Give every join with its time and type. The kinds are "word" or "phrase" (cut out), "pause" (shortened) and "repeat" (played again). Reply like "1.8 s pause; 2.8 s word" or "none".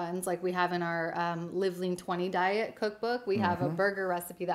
none